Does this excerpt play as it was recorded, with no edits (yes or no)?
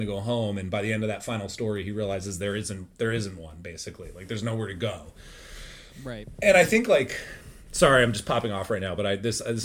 yes